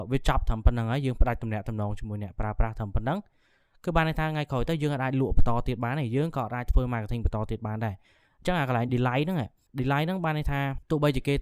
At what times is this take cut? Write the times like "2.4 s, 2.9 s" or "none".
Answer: none